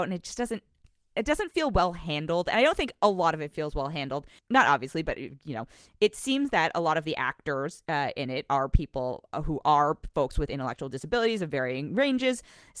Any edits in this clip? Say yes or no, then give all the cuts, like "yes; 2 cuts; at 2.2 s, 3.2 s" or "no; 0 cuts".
no; 0 cuts